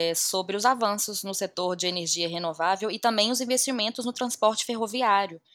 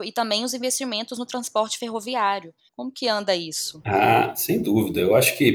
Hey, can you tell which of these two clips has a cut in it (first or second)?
second